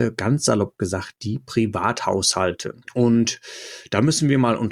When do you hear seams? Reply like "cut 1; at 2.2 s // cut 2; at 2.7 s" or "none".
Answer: cut 1; at 2.8 s